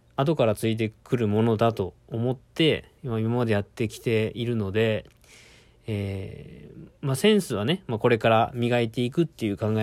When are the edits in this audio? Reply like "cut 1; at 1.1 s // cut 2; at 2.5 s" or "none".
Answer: cut 1; at 2.0 s // cut 2; at 3.0 s // cut 3; at 7.0 s